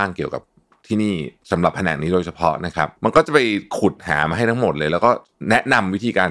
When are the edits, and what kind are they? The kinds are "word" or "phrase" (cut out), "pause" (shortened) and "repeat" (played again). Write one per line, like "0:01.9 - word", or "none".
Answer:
0:03.0 - pause